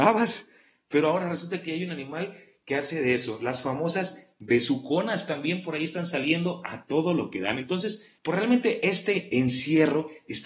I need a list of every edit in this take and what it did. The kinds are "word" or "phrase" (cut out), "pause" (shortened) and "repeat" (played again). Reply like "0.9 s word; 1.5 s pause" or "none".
8.2 s pause